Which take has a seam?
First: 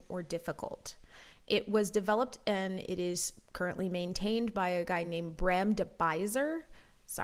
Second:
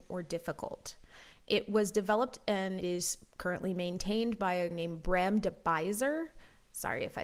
second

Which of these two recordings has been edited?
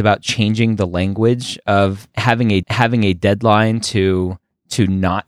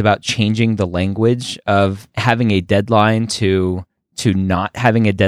first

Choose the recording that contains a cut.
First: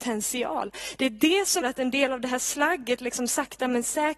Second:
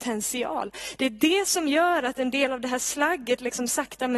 first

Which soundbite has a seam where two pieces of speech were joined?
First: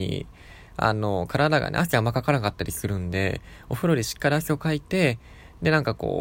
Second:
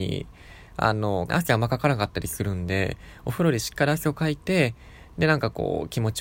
second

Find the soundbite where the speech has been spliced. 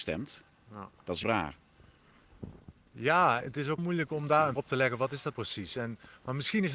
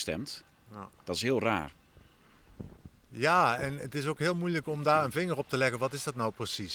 first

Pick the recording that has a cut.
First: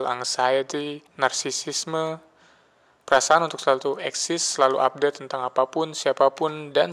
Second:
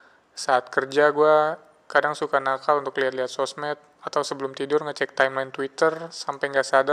first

